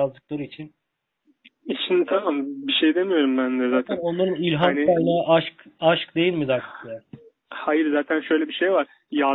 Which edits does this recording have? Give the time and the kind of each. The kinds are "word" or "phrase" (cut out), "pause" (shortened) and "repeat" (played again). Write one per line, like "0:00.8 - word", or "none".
none

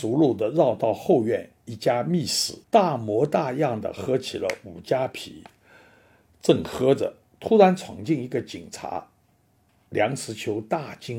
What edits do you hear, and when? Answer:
0:02.6 - pause

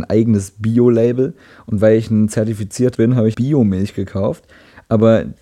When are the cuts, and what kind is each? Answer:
0:02.9 - word
0:03.3 - word

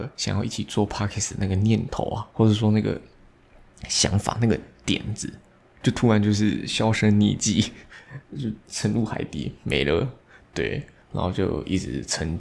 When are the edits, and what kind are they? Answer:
0:02.3 - pause

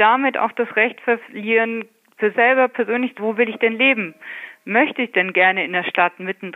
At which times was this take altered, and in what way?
0:02.3 - word
0:03.2 - word

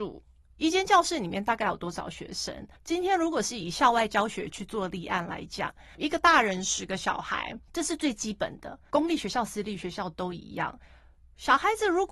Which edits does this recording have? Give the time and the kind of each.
0:02.8 - pause

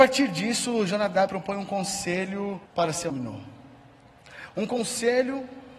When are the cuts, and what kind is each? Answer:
0:01.3 - word
0:02.7 - pause
0:03.1 - word

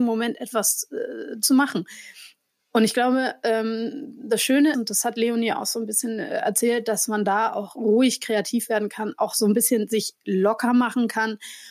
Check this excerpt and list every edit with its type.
0:04.7 - word

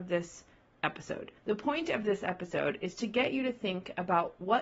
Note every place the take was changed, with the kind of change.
0:01.4 - pause

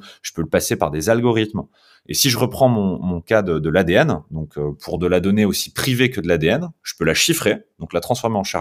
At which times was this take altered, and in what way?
none

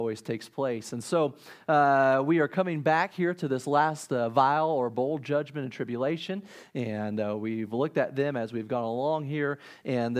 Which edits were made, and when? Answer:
none

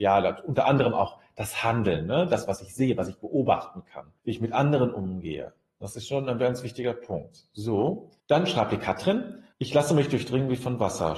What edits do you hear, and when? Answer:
0:04.2 - pause
0:08.2 - pause
0:09.5 - pause

